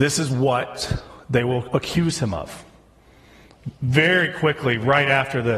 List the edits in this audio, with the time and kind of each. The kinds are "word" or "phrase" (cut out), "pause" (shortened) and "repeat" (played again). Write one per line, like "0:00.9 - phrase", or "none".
none